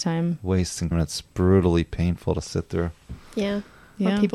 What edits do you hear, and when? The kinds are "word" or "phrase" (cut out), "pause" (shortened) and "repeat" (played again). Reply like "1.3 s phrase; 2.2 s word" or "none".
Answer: 0.9 s word